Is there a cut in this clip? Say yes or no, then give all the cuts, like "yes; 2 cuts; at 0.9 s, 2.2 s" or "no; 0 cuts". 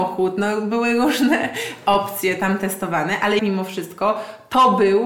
yes; 1 cut; at 3.4 s